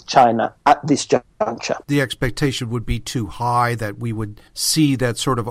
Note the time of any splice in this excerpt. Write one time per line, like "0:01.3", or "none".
0:01.8
0:04.5